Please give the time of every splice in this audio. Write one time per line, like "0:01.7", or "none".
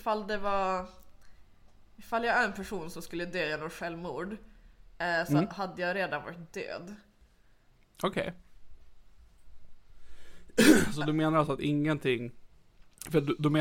none